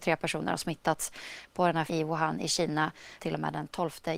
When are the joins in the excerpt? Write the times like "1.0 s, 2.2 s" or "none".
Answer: 1.9 s, 3.2 s